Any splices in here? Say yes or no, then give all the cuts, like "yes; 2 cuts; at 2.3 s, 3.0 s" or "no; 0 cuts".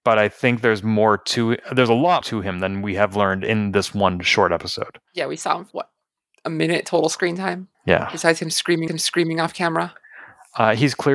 yes; 5 cuts; at 2.2 s, 5.1 s, 5.7 s, 7.7 s, 8.9 s